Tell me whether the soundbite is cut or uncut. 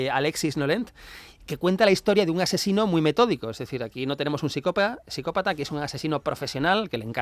uncut